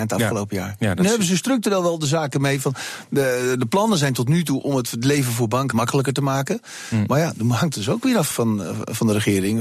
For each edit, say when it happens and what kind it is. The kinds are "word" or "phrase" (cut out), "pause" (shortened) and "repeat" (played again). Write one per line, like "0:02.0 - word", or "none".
0:05.7 - word
0:08.3 - word